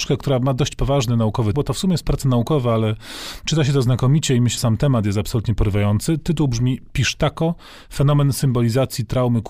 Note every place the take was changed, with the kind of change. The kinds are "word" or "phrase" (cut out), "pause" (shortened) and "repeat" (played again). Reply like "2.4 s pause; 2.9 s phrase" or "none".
1.5 s word; 4.6 s word